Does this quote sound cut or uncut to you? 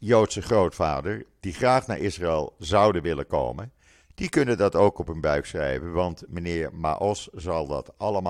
uncut